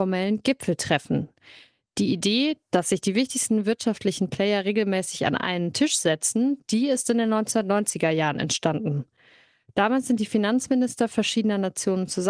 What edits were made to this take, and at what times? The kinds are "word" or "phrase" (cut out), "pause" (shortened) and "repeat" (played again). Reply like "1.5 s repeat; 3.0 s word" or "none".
none